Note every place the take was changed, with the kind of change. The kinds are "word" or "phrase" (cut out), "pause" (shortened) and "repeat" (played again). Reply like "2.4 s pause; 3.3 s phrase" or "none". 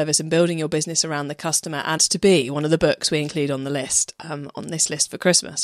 2.0 s phrase

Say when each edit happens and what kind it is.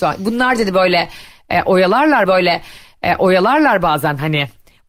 2.3 s repeat

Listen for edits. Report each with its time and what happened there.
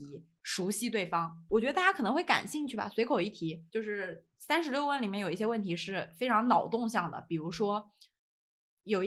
3.7 s pause; 4.3 s pause

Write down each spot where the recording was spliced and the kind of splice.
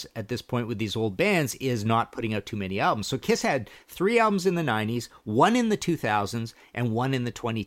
none

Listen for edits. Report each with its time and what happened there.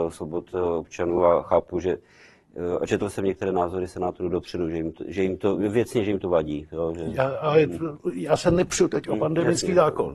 none

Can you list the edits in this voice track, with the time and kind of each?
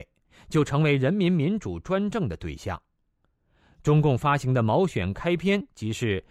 none

